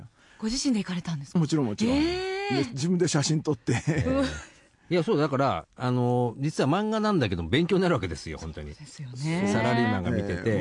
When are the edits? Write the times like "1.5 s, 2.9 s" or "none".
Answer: none